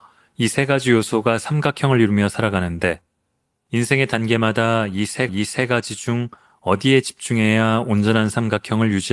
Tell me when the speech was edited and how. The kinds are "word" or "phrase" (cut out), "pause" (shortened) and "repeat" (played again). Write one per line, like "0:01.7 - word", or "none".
0:05.3 - repeat